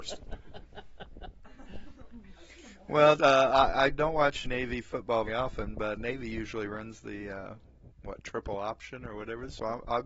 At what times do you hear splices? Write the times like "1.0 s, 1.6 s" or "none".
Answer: 3.2 s, 4.4 s, 5.3 s, 6.0 s

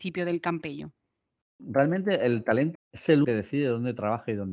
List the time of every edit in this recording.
2.7 s, 3.2 s

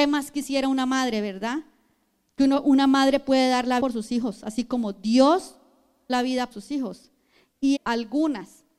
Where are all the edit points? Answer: 3.8 s, 6.1 s, 6.5 s, 7.8 s

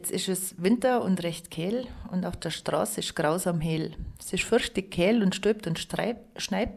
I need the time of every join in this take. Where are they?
none

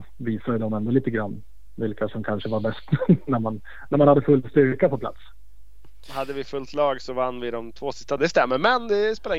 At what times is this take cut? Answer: 8.2 s

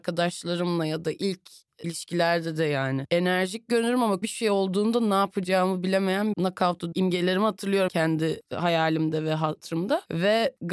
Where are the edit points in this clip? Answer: 1.8 s, 4.2 s, 6.3 s, 6.9 s, 7.9 s

